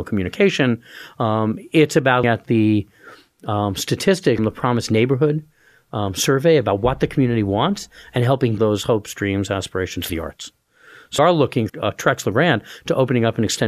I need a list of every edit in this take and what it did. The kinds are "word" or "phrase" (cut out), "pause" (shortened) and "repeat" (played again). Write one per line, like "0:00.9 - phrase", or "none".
0:02.2 - word
0:04.4 - word
0:08.6 - word
0:10.1 - word
0:11.2 - word
0:11.7 - word